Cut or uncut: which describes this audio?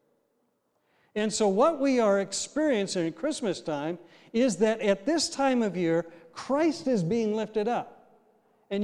uncut